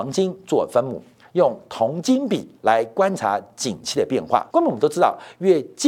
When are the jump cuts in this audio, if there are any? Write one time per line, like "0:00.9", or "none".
0:02.6
0:04.5